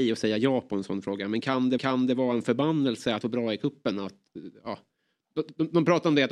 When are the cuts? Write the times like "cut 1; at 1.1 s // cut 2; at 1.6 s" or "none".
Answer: cut 1; at 1.8 s // cut 2; at 3.2 s